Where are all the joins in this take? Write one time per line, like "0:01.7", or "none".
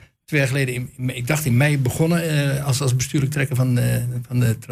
none